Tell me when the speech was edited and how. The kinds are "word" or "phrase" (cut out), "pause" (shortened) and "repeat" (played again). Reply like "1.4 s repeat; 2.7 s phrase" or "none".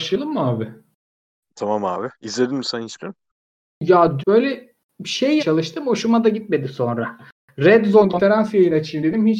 2.1 s pause; 3.0 s word; 4.2 s word; 5.4 s word; 8.1 s word